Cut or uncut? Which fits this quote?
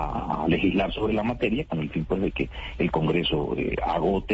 uncut